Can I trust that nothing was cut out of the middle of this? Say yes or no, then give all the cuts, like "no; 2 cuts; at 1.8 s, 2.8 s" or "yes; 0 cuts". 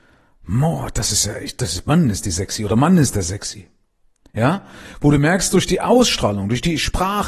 yes; 0 cuts